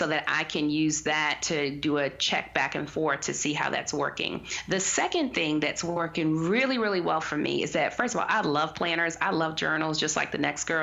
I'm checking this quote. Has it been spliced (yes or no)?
no